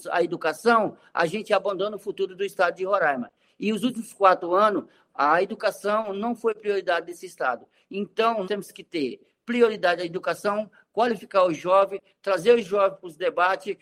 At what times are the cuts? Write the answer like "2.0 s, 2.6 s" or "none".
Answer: 8.4 s